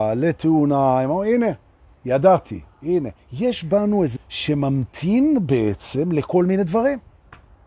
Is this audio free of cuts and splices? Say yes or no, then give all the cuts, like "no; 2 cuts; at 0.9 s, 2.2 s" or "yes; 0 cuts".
no; 1 cut; at 4.2 s